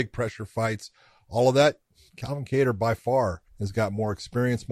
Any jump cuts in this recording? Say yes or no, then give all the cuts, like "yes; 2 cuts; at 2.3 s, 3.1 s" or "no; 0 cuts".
yes; 1 cut; at 3.5 s